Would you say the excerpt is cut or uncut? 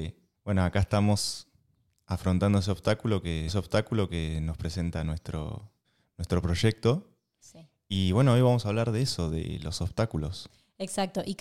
cut